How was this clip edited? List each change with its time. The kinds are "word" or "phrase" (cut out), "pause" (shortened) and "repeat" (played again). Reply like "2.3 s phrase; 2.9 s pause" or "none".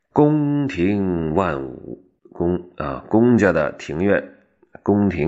2.2 s pause

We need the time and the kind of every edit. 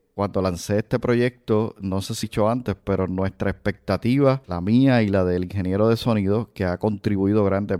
2.2 s phrase; 4.4 s pause

